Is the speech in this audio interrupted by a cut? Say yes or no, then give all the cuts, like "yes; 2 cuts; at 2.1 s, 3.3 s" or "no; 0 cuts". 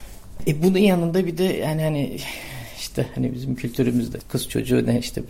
no; 0 cuts